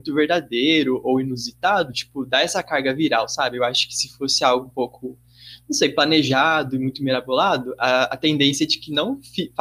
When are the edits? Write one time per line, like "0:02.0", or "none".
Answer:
none